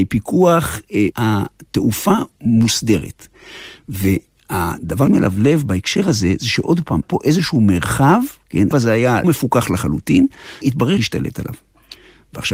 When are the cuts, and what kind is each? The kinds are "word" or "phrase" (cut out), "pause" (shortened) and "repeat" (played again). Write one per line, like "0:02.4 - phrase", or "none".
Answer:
0:01.1 - word
0:05.1 - word
0:07.0 - word
0:08.7 - word
0:09.2 - word
0:10.6 - word
0:11.0 - word